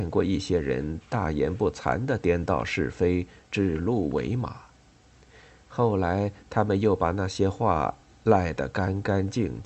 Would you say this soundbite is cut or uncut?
uncut